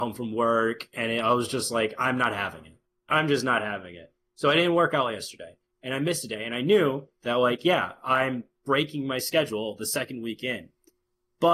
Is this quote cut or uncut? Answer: uncut